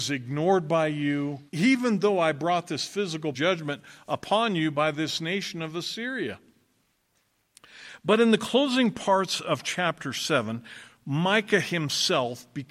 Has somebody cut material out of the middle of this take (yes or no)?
yes